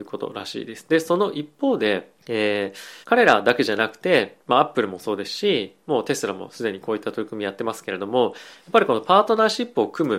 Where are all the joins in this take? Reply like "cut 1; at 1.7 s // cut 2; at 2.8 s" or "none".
cut 1; at 2.2 s // cut 2; at 3.0 s // cut 3; at 4.4 s